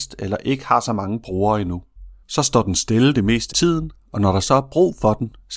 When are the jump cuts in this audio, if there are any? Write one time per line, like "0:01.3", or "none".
0:02.2
0:03.5